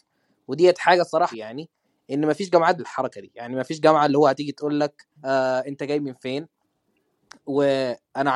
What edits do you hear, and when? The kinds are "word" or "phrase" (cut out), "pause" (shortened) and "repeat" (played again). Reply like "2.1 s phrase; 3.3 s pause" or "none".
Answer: 1.3 s phrase; 2.8 s word; 5.2 s pause